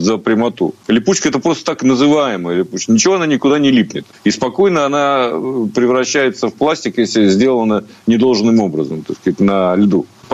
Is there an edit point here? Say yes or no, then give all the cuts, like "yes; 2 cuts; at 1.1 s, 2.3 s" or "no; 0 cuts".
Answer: no; 0 cuts